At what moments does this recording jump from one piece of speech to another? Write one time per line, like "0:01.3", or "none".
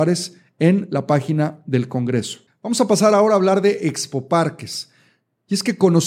0:02.5